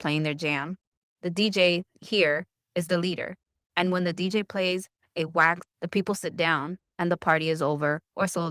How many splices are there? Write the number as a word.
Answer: one